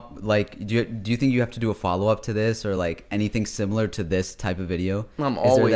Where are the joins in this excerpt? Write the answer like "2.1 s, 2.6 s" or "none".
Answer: none